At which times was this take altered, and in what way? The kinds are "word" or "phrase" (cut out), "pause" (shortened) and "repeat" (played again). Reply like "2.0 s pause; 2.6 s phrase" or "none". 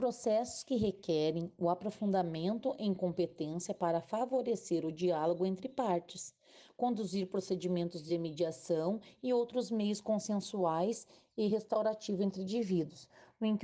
none